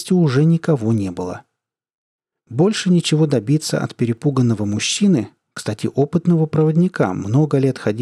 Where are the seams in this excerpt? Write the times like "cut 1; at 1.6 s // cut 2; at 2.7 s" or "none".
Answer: none